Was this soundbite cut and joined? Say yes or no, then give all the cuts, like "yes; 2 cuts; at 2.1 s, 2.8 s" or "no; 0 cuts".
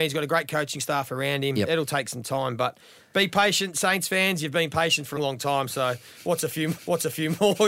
yes; 2 cuts; at 5.2 s, 6.8 s